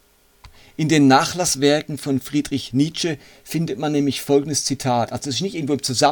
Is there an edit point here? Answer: no; 0 cuts

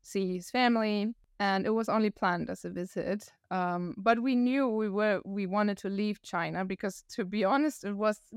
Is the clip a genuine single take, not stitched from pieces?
yes; 0 cuts

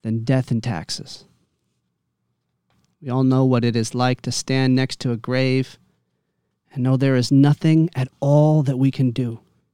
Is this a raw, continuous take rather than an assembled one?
yes; 0 cuts

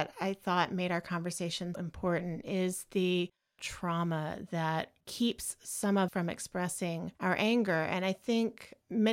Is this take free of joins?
no; 5 cuts; at 1.7 s, 3.6 s, 5.0 s, 6.1 s, 7.2 s

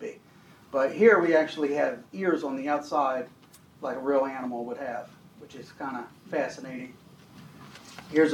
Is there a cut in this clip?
no; 0 cuts

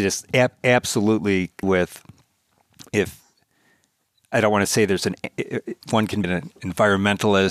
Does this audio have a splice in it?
yes; 5 cuts; at 1.6 s, 2.9 s, 4.3 s, 5.8 s, 6.2 s

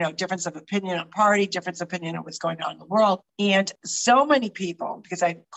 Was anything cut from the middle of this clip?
yes; 1 cut; at 3.3 s

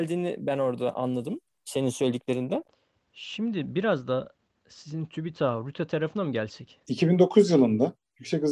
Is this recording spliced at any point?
yes; 1 cut; at 6.8 s

